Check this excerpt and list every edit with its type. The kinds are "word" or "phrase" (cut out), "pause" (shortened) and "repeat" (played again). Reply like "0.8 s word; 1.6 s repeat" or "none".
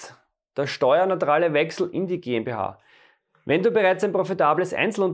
none

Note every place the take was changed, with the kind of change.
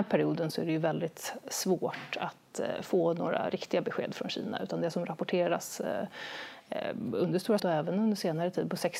7.6 s word

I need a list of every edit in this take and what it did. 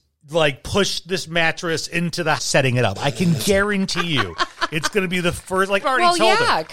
2.4 s phrase; 5.8 s word

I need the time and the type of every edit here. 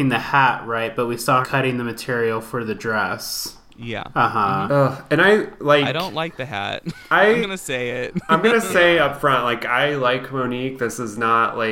1.4 s word; 7.4 s word

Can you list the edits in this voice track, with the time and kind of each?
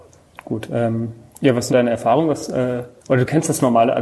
1.7 s word; 3.0 s pause

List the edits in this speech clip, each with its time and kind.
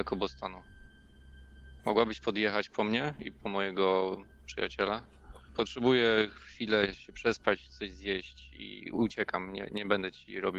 1.8 s pause; 5.5 s pause

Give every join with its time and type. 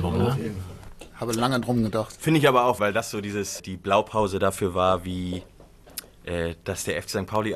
1.6 s word; 2.8 s word; 3.6 s word

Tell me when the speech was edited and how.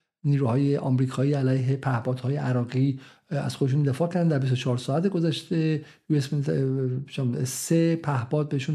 none

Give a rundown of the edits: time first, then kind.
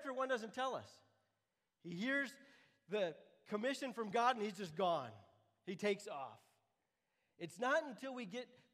none

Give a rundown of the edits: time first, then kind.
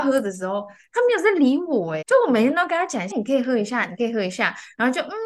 2.0 s word; 3.1 s phrase

